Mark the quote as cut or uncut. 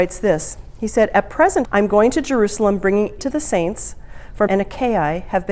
cut